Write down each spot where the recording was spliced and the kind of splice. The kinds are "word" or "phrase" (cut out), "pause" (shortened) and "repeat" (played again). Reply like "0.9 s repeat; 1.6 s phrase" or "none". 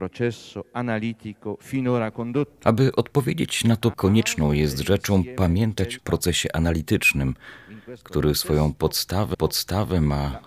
3.9 s word; 6.0 s phrase; 9.3 s repeat